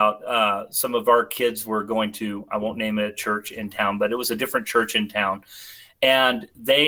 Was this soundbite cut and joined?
no; 0 cuts

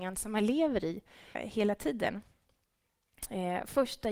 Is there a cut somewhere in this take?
yes; 1 cut; at 1.3 s

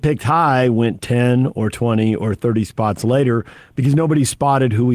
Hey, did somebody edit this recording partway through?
no; 0 cuts

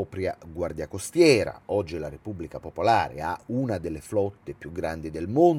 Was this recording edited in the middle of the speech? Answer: no; 0 cuts

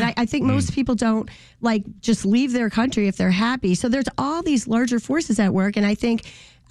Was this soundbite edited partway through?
no; 0 cuts

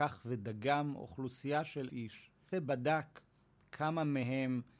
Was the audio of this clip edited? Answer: yes; 2 cuts; at 1.9 s, 2.5 s

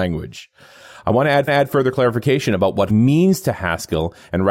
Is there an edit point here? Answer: yes; 2 cuts; at 1.5 s, 2.9 s

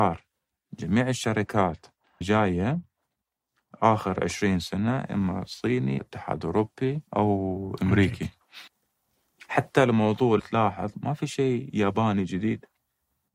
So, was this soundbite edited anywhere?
yes; 5 cuts; at 2.2 s, 6.0 s, 7.1 s, 8.7 s, 10.4 s

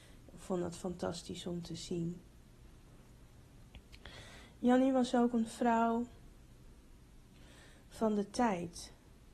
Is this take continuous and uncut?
yes; 0 cuts

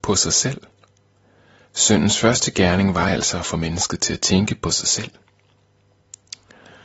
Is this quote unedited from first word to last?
yes; 0 cuts

